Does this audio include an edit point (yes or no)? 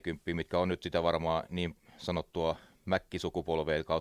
no